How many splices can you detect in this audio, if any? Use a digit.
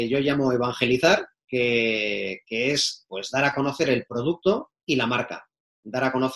1